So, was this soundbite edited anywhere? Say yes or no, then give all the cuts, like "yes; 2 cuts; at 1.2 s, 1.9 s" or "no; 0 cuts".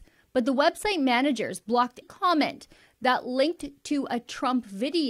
yes; 1 cut; at 2.0 s